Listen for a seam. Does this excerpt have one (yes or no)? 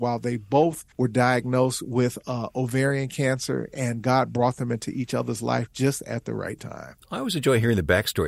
yes